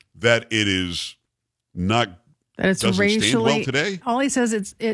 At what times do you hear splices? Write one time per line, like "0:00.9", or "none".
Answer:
none